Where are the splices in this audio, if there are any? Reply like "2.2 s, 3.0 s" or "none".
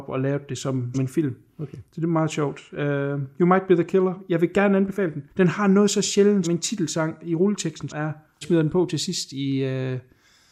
0.9 s, 5.3 s, 6.4 s, 7.9 s, 8.4 s